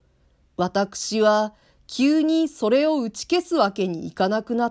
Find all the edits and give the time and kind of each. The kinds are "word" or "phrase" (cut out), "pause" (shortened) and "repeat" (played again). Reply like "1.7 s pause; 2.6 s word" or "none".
none